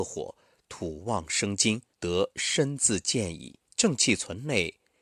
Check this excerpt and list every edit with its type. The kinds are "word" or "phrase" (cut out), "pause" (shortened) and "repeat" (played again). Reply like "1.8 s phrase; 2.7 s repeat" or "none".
1.9 s pause; 3.7 s pause